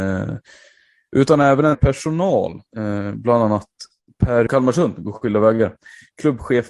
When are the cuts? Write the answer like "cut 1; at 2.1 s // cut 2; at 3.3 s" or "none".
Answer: cut 1; at 1.7 s // cut 2; at 4.5 s